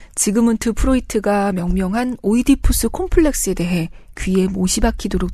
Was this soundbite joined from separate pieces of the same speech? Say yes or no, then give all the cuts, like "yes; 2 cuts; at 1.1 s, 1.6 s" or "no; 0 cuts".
no; 0 cuts